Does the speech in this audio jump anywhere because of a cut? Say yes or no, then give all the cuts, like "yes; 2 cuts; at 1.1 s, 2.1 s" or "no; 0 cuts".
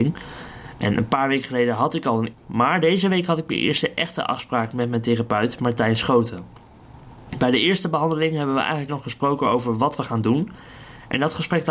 yes; 2 cuts; at 2.3 s, 8.9 s